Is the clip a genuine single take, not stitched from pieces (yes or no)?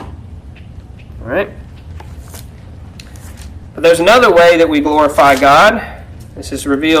yes